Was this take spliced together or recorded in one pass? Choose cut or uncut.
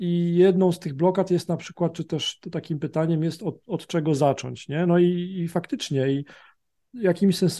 uncut